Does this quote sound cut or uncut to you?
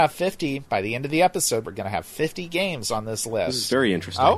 uncut